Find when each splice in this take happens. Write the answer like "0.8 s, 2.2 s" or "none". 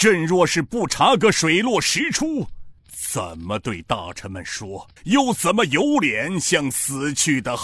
2.8 s, 5.0 s